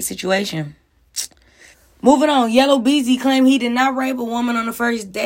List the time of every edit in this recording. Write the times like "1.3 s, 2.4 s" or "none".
1.7 s